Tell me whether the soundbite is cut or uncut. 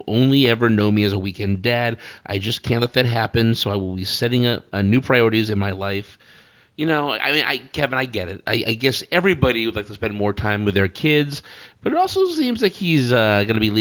uncut